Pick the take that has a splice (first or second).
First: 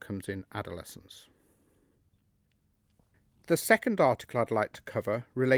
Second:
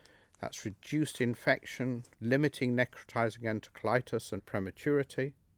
second